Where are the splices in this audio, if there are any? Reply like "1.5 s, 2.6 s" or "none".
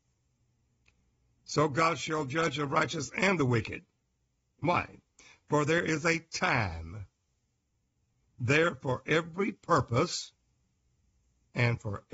none